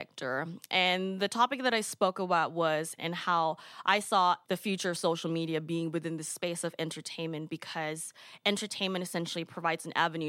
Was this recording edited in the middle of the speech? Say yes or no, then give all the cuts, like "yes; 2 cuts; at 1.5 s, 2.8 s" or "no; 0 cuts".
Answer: yes; 2 cuts; at 3.0 s, 4.4 s